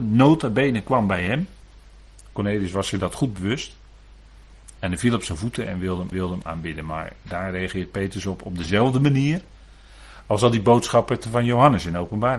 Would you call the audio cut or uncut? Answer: cut